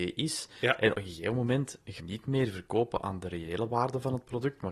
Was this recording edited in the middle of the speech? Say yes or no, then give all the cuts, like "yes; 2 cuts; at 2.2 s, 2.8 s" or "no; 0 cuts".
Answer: yes; 2 cuts; at 0.9 s, 2.0 s